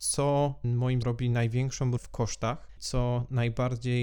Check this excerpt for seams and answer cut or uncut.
cut